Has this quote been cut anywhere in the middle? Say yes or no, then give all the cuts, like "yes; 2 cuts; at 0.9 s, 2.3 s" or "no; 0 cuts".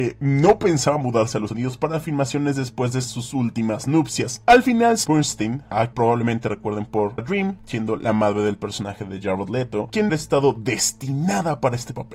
yes; 5 cuts; at 1.5 s, 5.0 s, 5.9 s, 7.2 s, 10.1 s